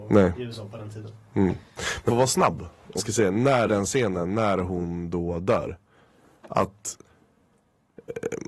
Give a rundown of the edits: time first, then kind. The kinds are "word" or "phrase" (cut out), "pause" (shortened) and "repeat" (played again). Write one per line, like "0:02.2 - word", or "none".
0:02.1 - word
0:03.0 - word
0:03.7 - word